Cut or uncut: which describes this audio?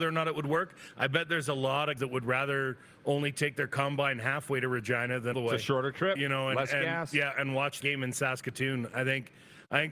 cut